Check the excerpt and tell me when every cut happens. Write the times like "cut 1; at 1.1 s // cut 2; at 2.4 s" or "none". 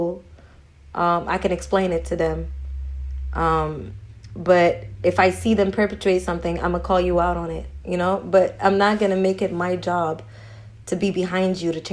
none